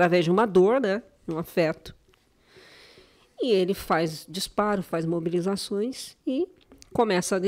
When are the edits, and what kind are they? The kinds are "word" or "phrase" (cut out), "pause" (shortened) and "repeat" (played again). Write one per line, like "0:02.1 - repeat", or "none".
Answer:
none

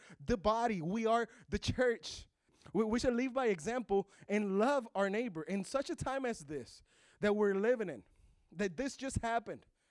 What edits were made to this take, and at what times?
none

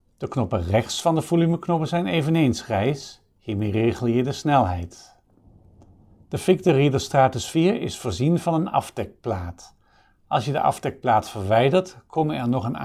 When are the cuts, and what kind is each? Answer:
none

